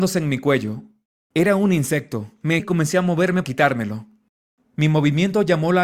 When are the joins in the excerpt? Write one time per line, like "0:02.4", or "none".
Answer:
0:02.6
0:03.4